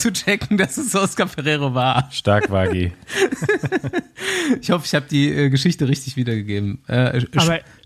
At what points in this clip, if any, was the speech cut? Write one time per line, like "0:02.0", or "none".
none

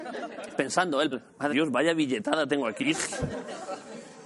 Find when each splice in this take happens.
0:01.1
0:01.5
0:02.8

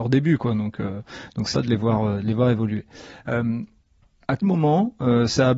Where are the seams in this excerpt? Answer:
0:01.5
0:04.4

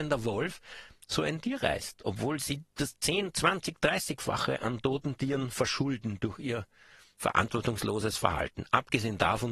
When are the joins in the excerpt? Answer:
none

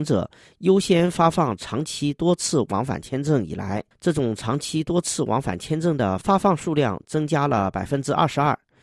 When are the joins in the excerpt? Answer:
0:03.9

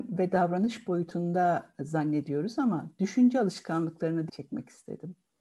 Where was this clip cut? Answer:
0:04.3

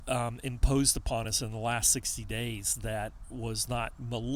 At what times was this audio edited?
none

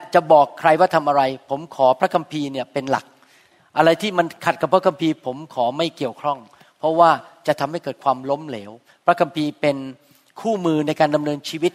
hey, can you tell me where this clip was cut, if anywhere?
none

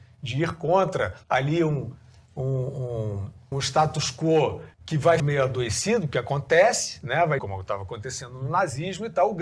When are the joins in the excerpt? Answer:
0:01.2
0:03.5
0:04.7
0:05.2
0:07.4

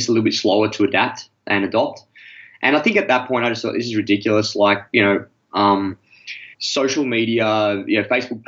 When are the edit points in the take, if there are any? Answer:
0:06.5

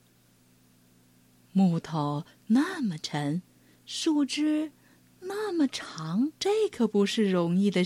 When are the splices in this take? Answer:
0:06.4

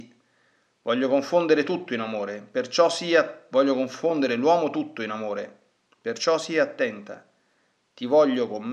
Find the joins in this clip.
none

